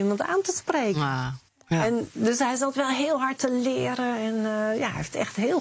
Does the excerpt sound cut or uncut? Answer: cut